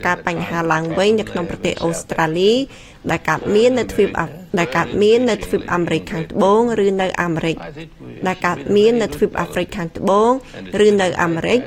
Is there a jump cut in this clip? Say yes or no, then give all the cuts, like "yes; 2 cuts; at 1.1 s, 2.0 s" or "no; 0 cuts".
yes; 1 cut; at 4.5 s